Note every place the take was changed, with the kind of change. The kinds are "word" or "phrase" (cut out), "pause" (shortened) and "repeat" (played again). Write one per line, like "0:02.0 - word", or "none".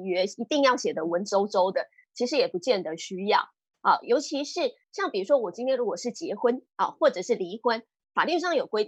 none